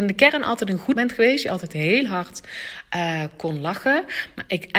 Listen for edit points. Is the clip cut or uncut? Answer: cut